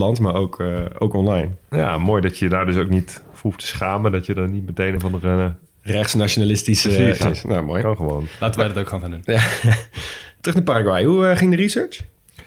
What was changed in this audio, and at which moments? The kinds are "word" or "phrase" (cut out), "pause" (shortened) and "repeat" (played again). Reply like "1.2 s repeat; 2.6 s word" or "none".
5.0 s word; 7.2 s word